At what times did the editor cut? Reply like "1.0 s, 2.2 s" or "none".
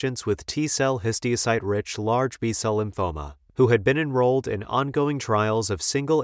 none

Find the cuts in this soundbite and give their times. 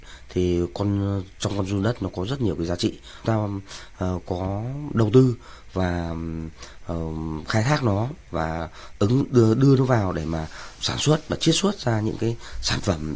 3.2 s, 10.8 s

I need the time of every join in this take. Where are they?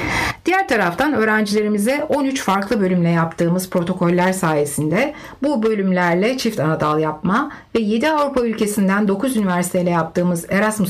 none

